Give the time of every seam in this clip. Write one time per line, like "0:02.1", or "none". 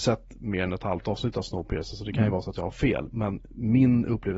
none